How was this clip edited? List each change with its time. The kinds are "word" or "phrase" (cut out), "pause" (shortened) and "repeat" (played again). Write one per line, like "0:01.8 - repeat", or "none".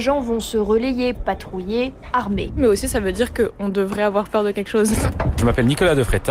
0:01.1 - word